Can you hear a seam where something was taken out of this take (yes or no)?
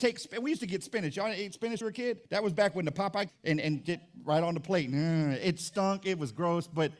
yes